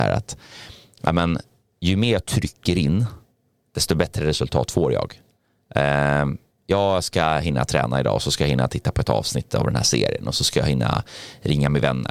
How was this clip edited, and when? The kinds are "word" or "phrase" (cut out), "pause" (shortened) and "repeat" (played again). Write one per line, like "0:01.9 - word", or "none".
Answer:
0:06.5 - pause